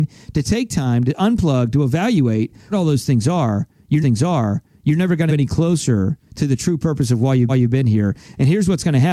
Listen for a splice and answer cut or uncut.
cut